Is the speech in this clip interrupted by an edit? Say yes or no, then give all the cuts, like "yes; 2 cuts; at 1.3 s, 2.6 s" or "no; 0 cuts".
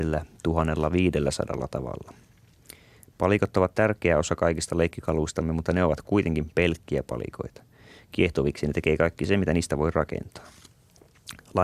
no; 0 cuts